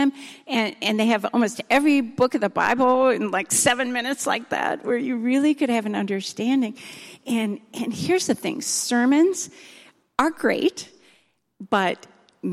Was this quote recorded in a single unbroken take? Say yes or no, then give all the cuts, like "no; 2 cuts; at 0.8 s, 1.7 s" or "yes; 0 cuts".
yes; 0 cuts